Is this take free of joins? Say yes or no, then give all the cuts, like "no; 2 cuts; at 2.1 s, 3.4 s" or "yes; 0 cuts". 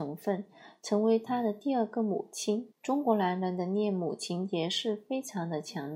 no; 1 cut; at 2.7 s